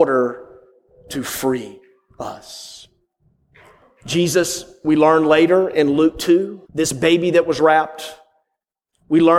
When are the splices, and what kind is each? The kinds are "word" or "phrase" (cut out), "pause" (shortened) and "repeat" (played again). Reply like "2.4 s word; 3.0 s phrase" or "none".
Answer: 6.6 s pause

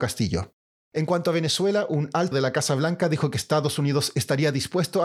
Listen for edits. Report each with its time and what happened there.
2.3 s word

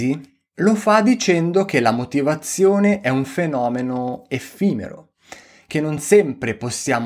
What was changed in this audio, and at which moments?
none

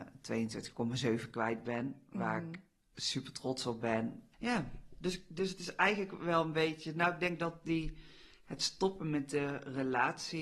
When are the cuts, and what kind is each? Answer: none

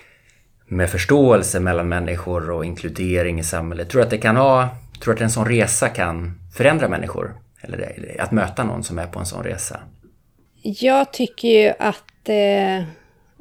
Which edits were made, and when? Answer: none

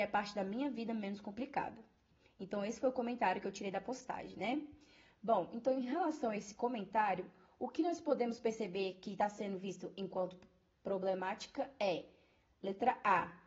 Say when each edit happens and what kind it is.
none

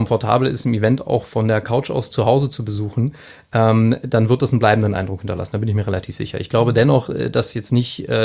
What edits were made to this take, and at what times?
none

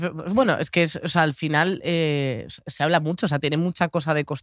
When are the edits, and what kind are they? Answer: none

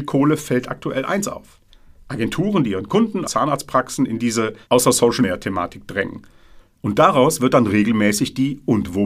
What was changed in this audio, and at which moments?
1.7 s pause; 3.2 s word; 4.6 s pause; 5.2 s phrase; 6.7 s pause

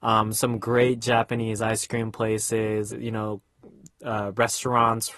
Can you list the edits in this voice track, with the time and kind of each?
2.9 s word

